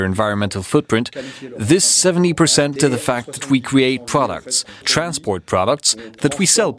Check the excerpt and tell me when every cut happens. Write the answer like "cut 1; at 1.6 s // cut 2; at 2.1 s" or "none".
cut 1; at 2.8 s // cut 2; at 4.8 s